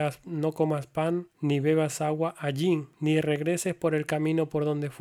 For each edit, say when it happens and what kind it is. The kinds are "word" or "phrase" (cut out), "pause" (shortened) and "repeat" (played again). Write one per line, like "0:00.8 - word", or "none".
0:01.3 - pause
0:02.9 - pause